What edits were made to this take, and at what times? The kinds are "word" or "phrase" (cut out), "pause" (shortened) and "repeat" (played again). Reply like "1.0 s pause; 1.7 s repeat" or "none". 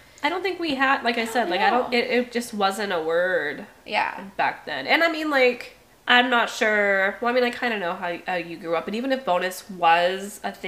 5.9 s pause